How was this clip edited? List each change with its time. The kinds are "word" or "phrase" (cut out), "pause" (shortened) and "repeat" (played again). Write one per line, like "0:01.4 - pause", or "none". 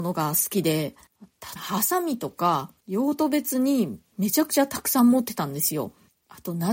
0:01.6 - phrase